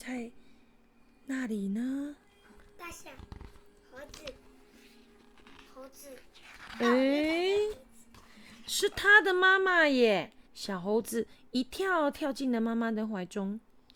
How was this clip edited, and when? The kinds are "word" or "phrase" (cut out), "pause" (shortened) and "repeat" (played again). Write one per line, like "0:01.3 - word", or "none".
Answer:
0:05.7 - pause
0:10.5 - pause